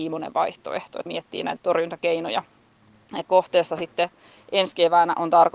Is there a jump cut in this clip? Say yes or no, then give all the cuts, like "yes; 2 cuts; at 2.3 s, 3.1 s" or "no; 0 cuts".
yes; 3 cuts; at 1.1 s, 1.6 s, 3.3 s